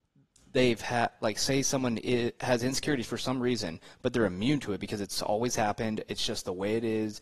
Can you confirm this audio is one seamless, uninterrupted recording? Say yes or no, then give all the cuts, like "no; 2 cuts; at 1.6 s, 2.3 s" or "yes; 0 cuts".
yes; 0 cuts